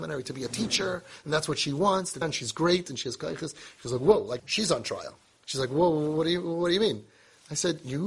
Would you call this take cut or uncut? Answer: cut